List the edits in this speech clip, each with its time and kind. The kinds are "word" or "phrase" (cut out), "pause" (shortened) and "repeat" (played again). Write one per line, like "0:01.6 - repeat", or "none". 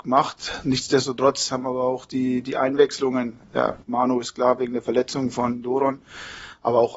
0:03.8 - pause